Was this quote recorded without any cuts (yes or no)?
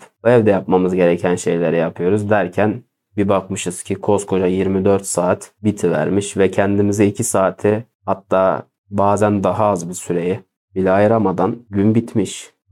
yes